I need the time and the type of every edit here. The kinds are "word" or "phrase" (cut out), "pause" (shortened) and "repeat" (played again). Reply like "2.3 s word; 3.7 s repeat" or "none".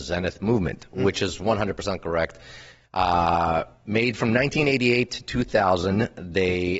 none

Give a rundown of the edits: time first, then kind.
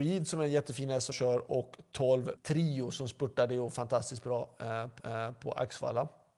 1.1 s word; 2.4 s phrase; 5.0 s repeat

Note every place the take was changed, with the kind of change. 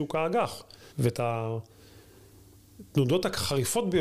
0.9 s pause

